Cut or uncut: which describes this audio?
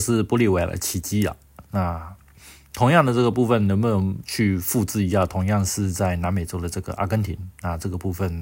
uncut